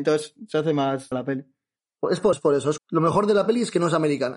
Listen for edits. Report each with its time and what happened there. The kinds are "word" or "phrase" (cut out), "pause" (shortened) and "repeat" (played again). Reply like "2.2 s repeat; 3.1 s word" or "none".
1.1 s word; 2.3 s word; 2.8 s word